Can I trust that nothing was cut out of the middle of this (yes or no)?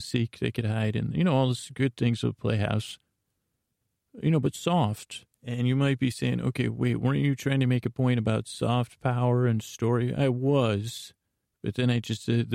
no